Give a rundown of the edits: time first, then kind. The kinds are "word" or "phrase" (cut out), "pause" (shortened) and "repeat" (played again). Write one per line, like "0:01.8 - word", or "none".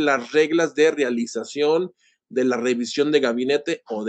none

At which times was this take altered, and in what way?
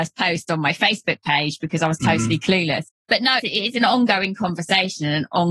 0:03.4 - word

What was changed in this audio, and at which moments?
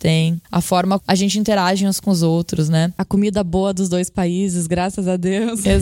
0:01.0 - word

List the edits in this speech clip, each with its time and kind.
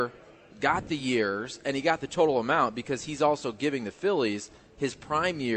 none

